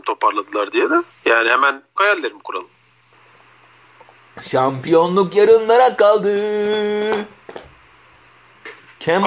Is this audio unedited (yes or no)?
no